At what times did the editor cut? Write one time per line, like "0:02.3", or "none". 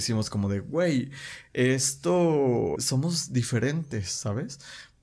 0:02.8